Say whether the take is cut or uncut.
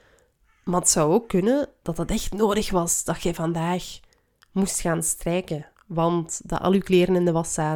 uncut